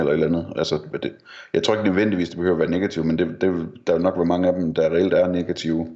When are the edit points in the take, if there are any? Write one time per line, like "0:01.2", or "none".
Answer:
none